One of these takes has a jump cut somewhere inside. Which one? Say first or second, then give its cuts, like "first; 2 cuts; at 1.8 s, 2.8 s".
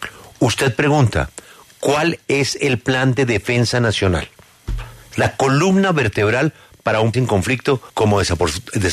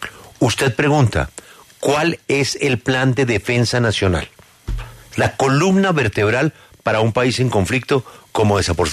first; 2 cuts; at 7.1 s, 7.9 s